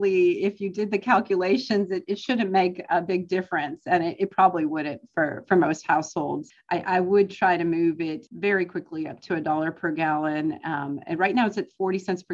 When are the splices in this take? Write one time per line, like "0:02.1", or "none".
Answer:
none